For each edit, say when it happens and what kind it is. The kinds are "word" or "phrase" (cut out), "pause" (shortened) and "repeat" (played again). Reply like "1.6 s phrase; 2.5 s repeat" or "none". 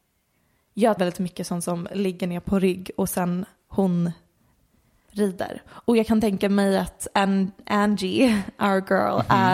1.0 s phrase